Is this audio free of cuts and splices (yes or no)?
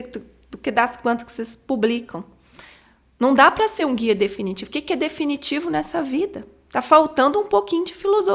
yes